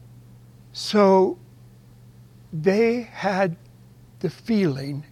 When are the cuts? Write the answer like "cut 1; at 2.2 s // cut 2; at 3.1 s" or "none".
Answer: none